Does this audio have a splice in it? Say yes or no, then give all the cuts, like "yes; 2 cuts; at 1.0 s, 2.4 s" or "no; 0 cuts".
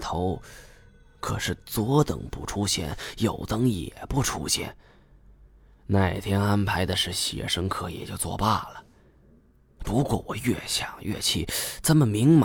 no; 0 cuts